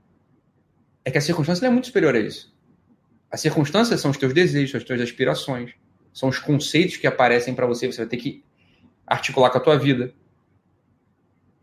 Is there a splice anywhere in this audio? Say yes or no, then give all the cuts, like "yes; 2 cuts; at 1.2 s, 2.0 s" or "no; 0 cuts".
no; 0 cuts